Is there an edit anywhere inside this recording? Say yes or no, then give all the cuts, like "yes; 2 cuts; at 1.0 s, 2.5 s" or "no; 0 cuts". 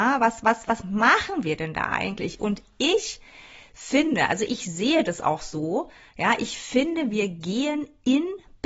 no; 0 cuts